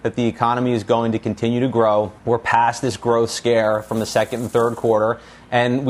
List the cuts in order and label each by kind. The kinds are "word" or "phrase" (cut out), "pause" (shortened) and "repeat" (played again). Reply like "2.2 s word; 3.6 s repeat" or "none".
2.2 s pause